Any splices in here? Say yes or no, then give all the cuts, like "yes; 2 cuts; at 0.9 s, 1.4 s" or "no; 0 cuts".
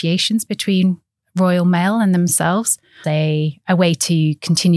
yes; 1 cut; at 3.0 s